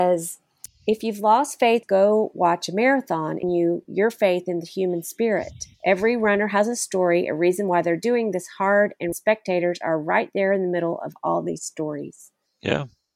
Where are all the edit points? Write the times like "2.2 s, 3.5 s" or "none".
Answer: 1.8 s, 3.4 s, 5.7 s, 9.1 s